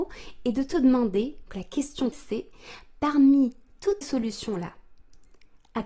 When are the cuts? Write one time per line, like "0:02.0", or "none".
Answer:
0:01.5
0:02.1
0:04.0